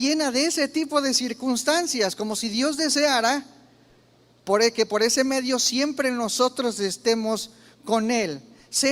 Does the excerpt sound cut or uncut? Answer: uncut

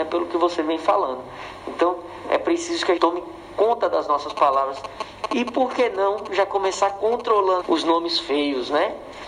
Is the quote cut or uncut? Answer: cut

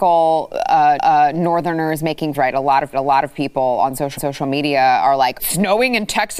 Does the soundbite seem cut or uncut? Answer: cut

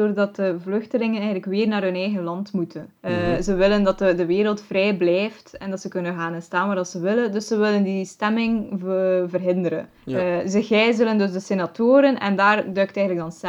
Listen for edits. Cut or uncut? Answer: cut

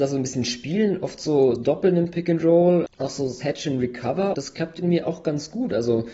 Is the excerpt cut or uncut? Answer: cut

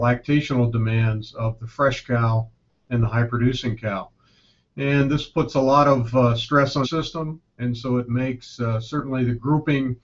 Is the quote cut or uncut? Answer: cut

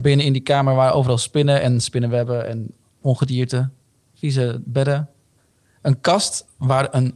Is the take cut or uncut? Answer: uncut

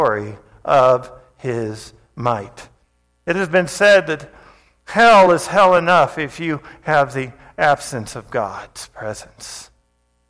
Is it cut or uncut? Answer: uncut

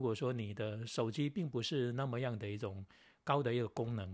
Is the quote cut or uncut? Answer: uncut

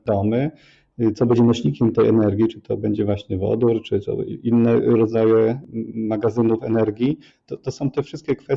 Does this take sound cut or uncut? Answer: cut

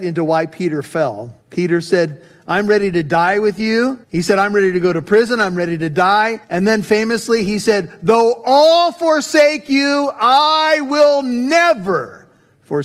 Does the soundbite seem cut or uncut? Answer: cut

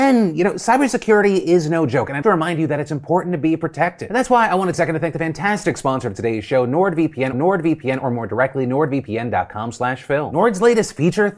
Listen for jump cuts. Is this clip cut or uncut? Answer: cut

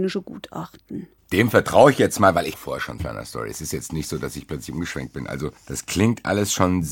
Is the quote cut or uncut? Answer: cut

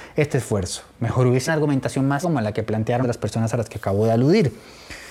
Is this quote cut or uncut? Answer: cut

